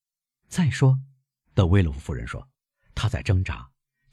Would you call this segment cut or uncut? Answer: uncut